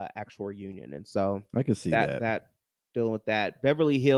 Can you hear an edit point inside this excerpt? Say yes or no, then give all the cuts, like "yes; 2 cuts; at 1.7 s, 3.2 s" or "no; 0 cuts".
no; 0 cuts